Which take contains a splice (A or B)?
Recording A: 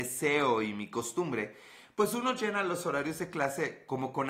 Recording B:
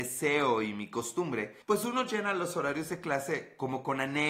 B